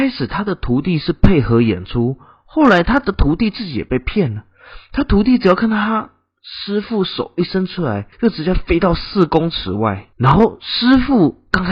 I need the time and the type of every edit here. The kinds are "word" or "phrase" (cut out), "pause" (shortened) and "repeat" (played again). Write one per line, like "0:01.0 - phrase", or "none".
0:08.1 - pause
0:10.1 - pause